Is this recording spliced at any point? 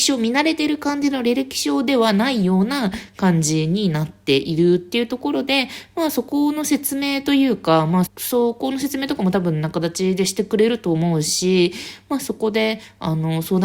yes; 1 cut; at 8.1 s

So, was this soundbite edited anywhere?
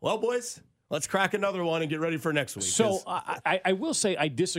no; 0 cuts

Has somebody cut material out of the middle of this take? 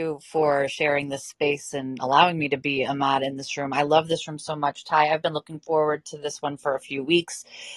no; 0 cuts

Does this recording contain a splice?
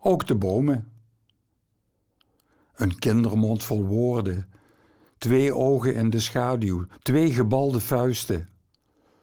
yes; 1 cut; at 7.0 s

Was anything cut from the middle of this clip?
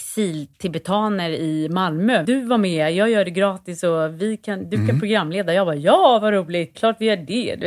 yes; 2 cuts; at 2.2 s, 6.7 s

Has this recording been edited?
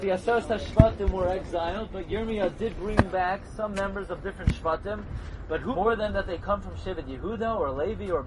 yes; 1 cut; at 5.7 s

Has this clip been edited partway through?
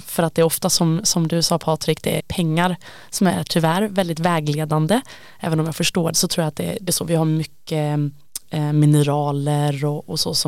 yes; 3 cuts; at 2.2 s, 6.1 s, 6.9 s

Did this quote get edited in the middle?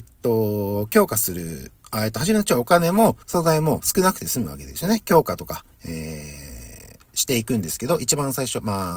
yes; 3 cuts; at 1.8 s, 3.2 s, 5.7 s

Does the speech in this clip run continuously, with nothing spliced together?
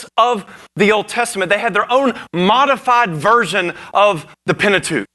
yes; 0 cuts

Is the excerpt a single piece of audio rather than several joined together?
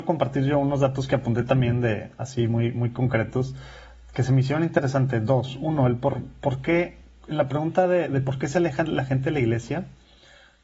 yes; 0 cuts

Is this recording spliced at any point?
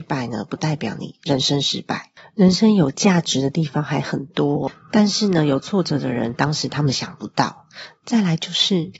no; 0 cuts

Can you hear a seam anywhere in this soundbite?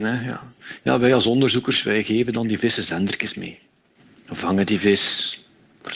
no; 0 cuts

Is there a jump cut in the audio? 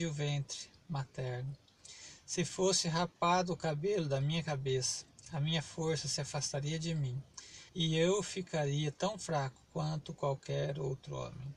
yes; 1 cut; at 7.7 s

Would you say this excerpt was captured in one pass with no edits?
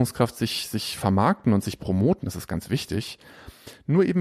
yes; 0 cuts

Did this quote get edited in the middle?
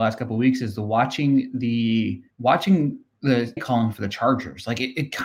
yes; 2 cuts; at 2.3 s, 3.6 s

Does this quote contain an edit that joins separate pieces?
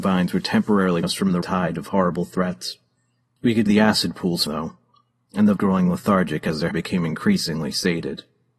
yes; 6 cuts; at 1.0 s, 1.4 s, 3.7 s, 4.5 s, 5.6 s, 6.7 s

